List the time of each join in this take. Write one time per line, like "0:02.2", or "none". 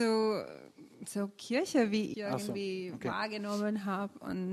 0:00.9
0:02.1